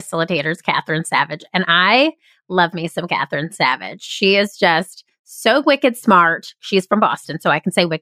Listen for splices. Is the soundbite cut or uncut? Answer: uncut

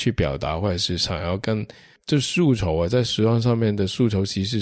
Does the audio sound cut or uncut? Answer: uncut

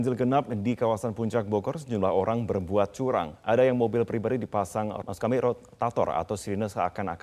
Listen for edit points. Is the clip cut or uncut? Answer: cut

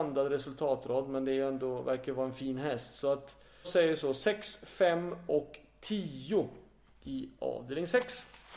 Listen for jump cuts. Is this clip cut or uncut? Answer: cut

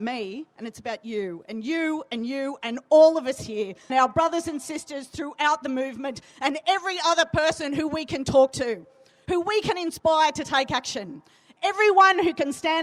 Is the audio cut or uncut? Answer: cut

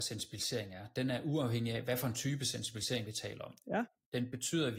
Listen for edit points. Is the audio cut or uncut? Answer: uncut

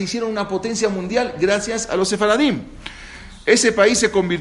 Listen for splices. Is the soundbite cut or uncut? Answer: uncut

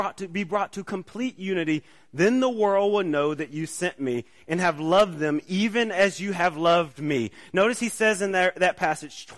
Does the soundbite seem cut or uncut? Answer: uncut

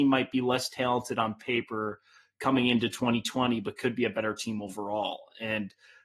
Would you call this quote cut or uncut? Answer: uncut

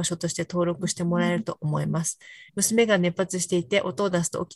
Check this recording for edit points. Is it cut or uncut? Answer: cut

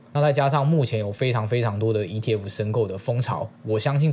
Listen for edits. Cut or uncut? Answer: uncut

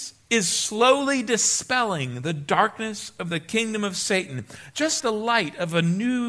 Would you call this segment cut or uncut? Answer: cut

